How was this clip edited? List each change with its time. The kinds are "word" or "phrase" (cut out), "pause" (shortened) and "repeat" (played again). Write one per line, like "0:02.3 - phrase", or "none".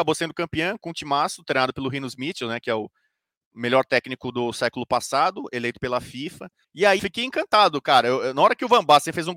0:06.6 - pause
0:07.0 - phrase